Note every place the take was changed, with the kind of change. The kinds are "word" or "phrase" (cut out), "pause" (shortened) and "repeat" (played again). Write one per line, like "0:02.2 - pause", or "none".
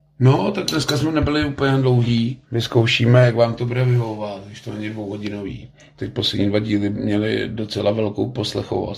0:02.4 - pause